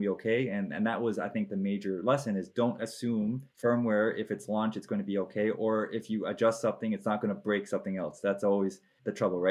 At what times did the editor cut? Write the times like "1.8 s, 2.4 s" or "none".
2.8 s, 3.5 s